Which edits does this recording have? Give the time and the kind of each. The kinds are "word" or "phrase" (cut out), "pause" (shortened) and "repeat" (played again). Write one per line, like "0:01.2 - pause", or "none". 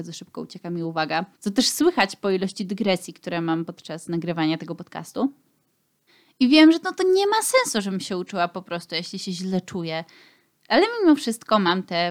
0:01.3 - pause
0:06.1 - pause